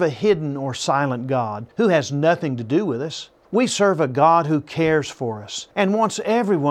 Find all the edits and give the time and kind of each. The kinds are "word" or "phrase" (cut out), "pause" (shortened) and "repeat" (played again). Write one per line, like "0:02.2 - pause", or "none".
0:01.7 - pause
0:03.4 - pause
0:05.7 - pause